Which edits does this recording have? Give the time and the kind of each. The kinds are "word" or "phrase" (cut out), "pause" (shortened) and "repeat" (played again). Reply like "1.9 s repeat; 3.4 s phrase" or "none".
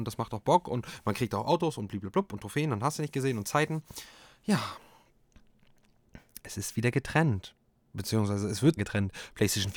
8.8 s word